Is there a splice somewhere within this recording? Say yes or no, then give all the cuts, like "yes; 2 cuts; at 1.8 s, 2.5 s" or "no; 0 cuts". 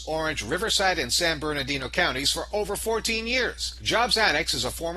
no; 0 cuts